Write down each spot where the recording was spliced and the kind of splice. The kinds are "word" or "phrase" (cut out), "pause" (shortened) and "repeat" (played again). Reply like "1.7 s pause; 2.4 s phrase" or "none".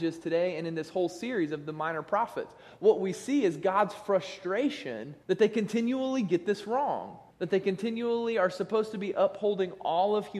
5.2 s pause; 7.3 s pause